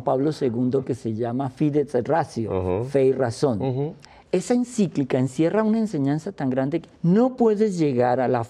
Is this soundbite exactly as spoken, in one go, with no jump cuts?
no; 2 cuts; at 4.1 s, 6.9 s

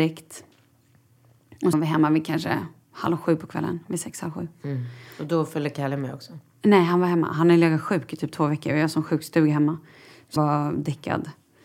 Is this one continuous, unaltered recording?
no; 2 cuts; at 1.7 s, 10.4 s

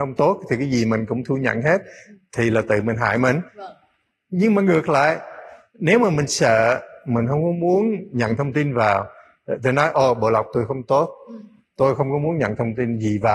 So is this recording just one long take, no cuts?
no; 1 cut; at 3.5 s

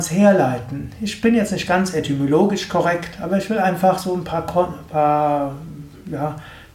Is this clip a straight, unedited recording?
yes; 0 cuts

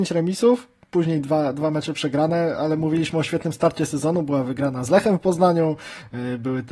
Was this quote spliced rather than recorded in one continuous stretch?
no; 0 cuts

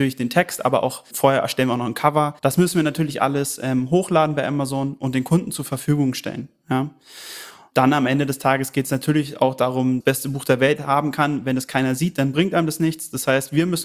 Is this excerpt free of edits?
no; 3 cuts; at 1.1 s, 2.4 s, 10.0 s

